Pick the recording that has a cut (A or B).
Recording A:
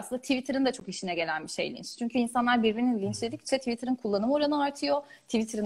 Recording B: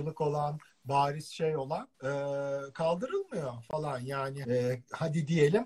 B